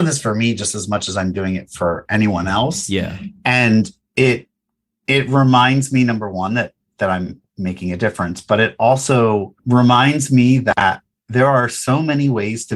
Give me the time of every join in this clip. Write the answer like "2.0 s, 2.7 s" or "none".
none